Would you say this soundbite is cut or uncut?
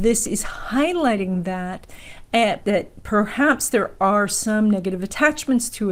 cut